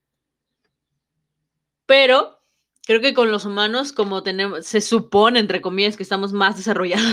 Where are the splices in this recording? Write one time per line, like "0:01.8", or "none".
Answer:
none